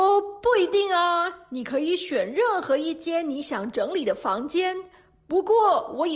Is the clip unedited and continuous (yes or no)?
yes